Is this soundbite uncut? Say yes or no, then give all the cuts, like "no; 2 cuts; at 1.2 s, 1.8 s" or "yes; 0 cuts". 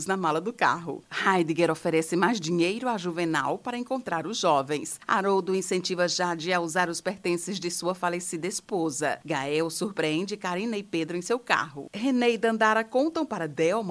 yes; 0 cuts